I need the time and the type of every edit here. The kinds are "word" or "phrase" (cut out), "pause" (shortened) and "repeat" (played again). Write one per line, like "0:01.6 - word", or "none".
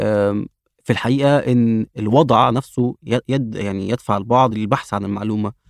none